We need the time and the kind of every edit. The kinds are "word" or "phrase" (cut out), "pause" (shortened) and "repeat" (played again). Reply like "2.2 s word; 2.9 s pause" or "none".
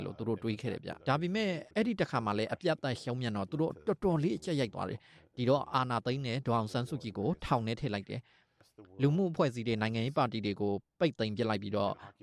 1.0 s pause; 1.7 s pause